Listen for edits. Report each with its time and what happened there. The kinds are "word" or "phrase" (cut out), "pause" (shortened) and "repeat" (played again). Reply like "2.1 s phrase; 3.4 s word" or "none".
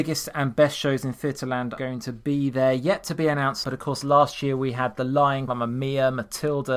1.8 s word; 3.6 s word; 5.5 s word